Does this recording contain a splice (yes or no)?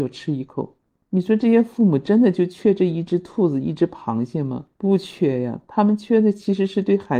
yes